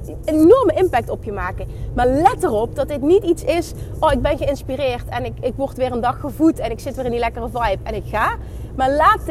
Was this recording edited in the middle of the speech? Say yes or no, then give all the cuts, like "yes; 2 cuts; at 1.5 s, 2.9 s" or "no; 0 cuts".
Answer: no; 0 cuts